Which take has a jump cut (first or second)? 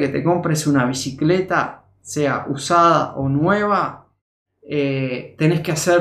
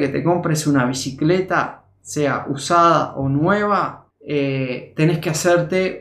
second